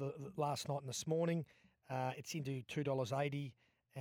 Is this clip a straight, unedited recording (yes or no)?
yes